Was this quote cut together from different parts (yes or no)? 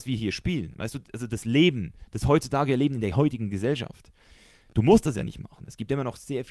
no